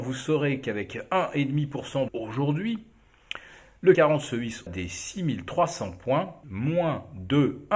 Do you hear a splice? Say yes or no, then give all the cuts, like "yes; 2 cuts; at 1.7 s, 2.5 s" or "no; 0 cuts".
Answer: yes; 4 cuts; at 2.1 s, 3.9 s, 4.7 s, 6.4 s